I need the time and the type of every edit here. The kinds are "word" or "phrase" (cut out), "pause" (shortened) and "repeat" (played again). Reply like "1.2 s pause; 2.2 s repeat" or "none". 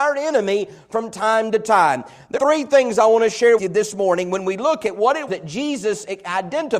2.4 s word; 3.6 s word; 5.3 s word